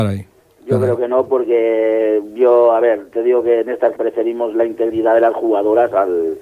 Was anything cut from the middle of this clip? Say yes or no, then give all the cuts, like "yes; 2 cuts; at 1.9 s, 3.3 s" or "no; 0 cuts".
yes; 1 cut; at 3.9 s